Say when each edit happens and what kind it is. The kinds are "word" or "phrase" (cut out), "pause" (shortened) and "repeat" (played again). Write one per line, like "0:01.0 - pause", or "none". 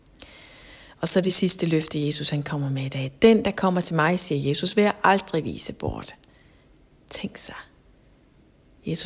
none